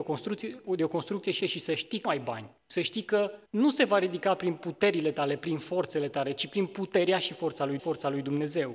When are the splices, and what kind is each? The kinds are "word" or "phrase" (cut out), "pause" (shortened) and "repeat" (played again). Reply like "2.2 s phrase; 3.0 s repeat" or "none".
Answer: 1.4 s repeat; 2.0 s word; 2.6 s pause; 3.5 s pause; 7.8 s repeat